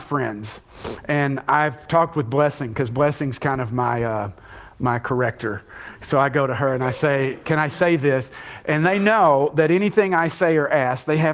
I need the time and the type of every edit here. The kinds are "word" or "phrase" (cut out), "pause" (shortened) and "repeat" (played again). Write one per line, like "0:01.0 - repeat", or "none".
none